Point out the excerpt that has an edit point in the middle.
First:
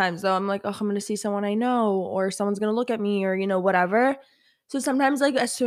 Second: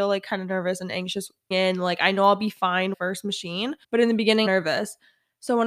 second; 4 cuts; at 1.5 s, 2.9 s, 3.8 s, 4.5 s

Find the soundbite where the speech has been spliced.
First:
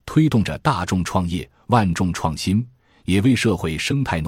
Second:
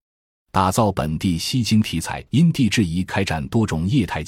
second; 1 cut; at 2.3 s

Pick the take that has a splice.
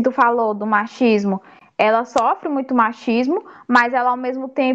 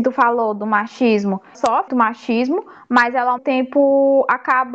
second; 3 cuts; at 1.5 s, 1.9 s, 3.4 s

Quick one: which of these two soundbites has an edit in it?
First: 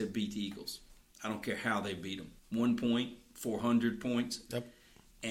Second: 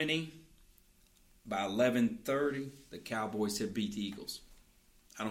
first; 2 cuts; at 1.1 s, 2.4 s

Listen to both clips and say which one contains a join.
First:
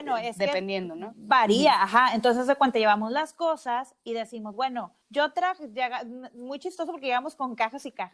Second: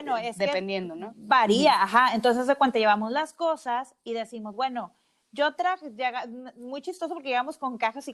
first; 1 cut; at 5.0 s

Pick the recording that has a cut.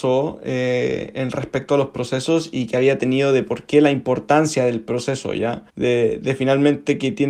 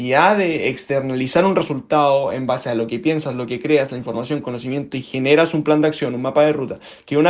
first; 1 cut; at 5.7 s

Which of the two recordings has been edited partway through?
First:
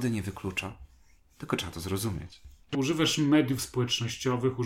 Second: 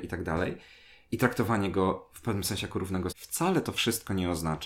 second; 1 cut; at 3.1 s

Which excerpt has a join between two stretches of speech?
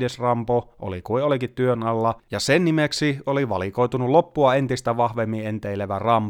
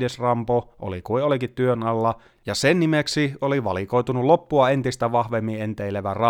first; 1 cut; at 2.2 s

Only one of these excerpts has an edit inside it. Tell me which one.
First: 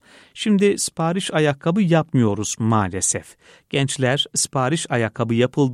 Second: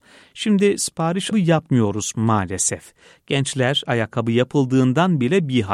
second; 2 cuts; at 1.3 s, 3.8 s

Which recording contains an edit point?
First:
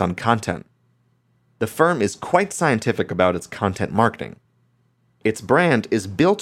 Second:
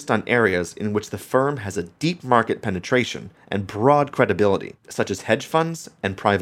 second; 1 cut; at 4.8 s

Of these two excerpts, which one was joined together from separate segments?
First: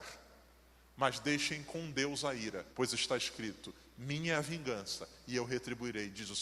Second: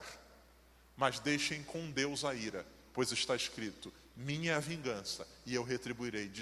first; 1 cut; at 2.7 s

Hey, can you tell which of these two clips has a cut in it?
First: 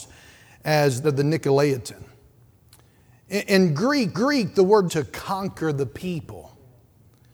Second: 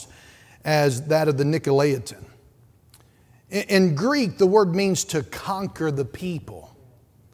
first; 3 cuts; at 1.0 s, 4.1 s, 4.9 s

